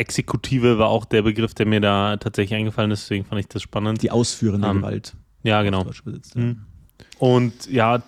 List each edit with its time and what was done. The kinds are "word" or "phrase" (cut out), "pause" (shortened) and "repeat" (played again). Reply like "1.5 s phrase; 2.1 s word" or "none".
5.2 s pause; 7.1 s pause